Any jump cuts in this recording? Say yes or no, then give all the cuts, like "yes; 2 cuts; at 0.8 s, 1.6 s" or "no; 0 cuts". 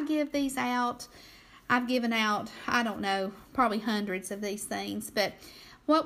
no; 0 cuts